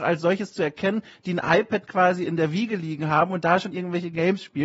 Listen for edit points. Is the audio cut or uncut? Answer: uncut